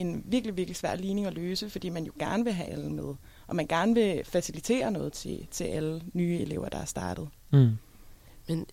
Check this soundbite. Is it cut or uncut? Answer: uncut